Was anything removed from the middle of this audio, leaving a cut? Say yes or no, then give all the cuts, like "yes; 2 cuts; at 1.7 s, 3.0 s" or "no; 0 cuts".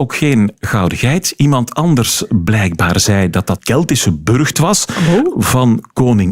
yes; 2 cuts; at 3.6 s, 4.5 s